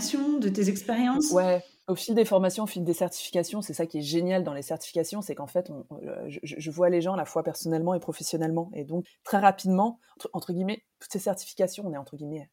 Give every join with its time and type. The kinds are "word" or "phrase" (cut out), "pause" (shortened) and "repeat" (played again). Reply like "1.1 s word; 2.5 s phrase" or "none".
9.0 s word